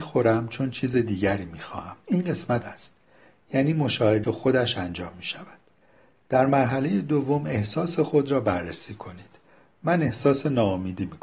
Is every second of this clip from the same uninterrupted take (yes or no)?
no